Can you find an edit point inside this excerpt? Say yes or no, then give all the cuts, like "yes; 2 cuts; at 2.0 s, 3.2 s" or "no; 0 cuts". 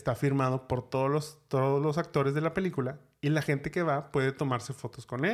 no; 0 cuts